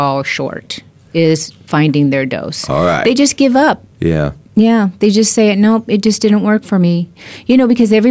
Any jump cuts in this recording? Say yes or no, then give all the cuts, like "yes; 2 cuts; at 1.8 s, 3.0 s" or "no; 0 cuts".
yes; 1 cut; at 3.9 s